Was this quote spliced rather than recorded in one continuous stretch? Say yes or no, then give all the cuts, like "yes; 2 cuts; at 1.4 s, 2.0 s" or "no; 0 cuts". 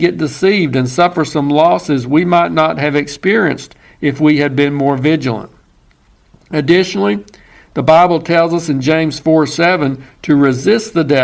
no; 0 cuts